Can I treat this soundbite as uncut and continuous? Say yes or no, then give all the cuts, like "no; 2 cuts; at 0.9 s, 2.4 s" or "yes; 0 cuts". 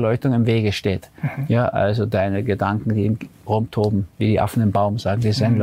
yes; 0 cuts